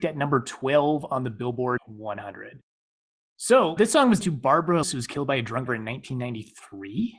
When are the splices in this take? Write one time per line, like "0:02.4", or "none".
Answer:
0:01.8
0:03.8
0:04.2
0:04.8
0:05.7